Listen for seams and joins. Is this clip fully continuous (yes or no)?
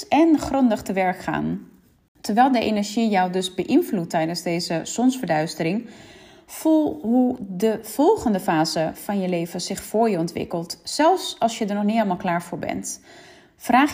yes